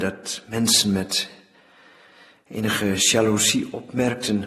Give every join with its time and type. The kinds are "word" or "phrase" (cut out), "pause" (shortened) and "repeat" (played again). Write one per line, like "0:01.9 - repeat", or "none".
none